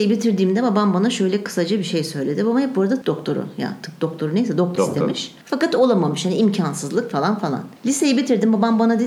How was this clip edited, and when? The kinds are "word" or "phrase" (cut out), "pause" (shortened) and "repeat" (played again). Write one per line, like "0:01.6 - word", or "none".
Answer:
0:03.0 - word
0:04.8 - word
0:05.4 - pause
0:07.8 - pause